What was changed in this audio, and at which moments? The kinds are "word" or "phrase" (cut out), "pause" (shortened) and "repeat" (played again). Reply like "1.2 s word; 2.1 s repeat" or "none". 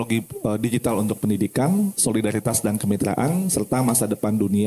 none